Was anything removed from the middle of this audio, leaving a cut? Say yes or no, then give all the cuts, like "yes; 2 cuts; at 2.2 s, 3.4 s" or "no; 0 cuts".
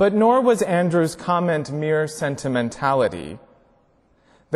no; 0 cuts